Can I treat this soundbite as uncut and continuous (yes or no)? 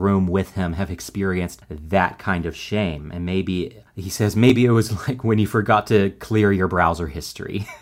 yes